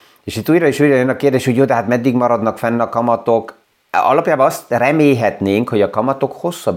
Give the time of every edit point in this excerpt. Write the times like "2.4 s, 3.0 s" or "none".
3.6 s